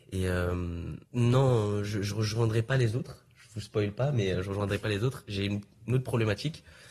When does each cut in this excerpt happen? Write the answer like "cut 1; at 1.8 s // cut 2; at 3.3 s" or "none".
cut 1; at 1.1 s